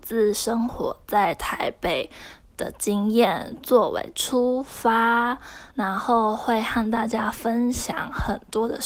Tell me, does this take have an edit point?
yes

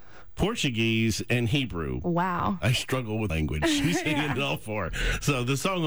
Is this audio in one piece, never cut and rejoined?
no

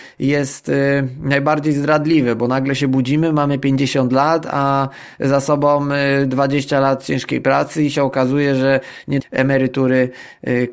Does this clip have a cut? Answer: yes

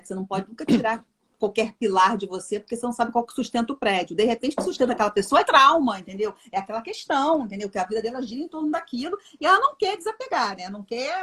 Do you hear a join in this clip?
yes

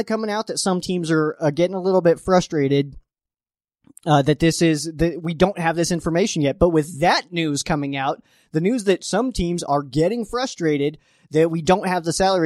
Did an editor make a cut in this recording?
no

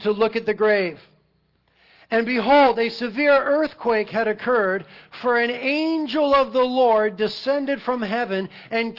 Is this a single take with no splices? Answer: yes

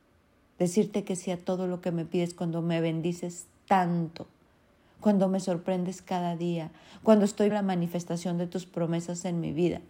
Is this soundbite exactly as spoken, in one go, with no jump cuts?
no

